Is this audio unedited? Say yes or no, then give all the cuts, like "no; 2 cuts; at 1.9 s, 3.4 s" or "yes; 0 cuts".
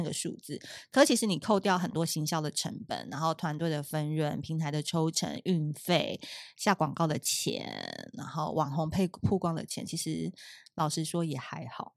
yes; 0 cuts